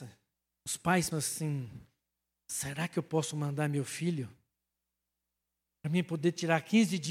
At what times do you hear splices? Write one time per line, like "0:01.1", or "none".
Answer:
0:01.1